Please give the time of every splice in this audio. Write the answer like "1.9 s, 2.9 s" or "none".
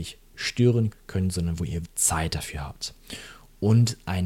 0.9 s, 1.8 s